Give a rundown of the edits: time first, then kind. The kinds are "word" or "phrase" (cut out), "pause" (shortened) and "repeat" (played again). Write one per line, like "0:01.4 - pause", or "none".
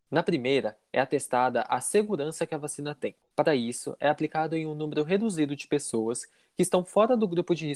none